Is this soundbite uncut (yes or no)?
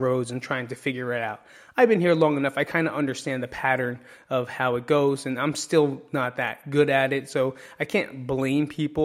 yes